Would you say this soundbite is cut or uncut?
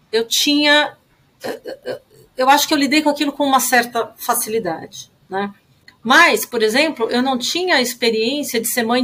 cut